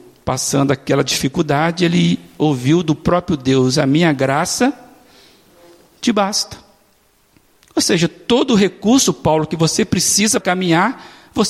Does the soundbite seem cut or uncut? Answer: cut